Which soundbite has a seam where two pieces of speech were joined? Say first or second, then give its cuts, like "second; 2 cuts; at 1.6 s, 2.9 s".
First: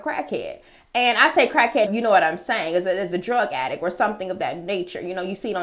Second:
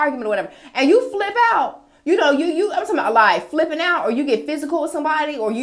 first; 1 cut; at 1.9 s